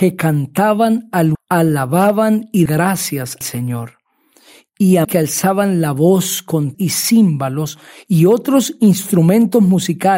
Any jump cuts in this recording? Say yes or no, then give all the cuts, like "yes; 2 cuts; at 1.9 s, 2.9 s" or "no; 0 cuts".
yes; 5 cuts; at 1.3 s, 2.7 s, 3.4 s, 5.0 s, 6.7 s